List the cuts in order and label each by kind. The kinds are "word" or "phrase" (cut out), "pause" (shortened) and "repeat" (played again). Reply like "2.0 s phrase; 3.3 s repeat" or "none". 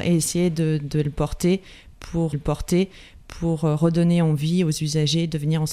2.3 s repeat